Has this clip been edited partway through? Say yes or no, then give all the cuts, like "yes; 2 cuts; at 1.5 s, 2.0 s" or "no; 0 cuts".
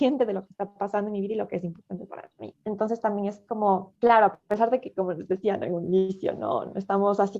yes; 2 cuts; at 2.6 s, 4.0 s